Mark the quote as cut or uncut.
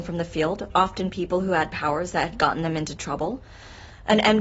uncut